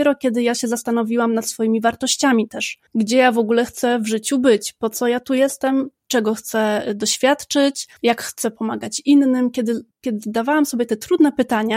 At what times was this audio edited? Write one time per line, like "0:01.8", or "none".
0:02.9
0:08.0